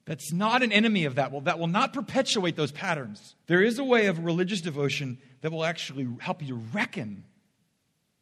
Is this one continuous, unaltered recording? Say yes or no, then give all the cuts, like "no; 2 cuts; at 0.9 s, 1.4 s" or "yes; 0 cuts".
no; 1 cut; at 3.4 s